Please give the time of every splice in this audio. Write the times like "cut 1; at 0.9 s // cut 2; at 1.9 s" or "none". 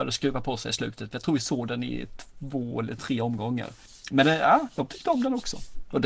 none